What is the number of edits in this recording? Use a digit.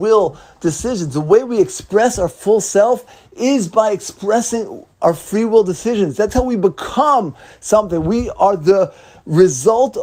0